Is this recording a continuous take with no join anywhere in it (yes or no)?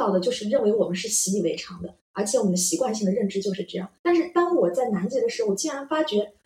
no